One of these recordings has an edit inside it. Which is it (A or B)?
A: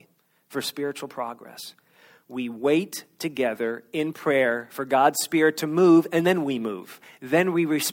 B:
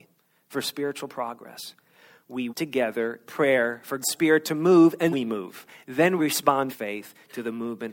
B